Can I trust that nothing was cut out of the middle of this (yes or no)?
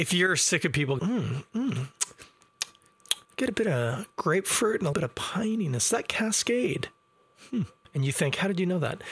no